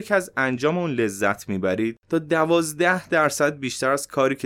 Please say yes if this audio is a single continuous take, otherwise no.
no